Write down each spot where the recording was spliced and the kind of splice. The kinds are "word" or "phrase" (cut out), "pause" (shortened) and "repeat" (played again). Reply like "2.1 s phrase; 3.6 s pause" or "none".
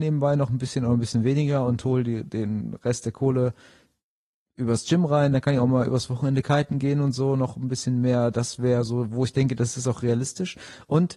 none